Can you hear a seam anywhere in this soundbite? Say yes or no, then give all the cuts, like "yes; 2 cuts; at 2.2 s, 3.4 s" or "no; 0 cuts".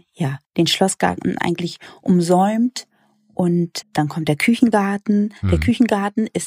yes; 1 cut; at 3.8 s